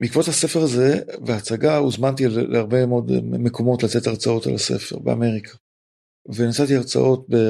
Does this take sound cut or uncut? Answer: uncut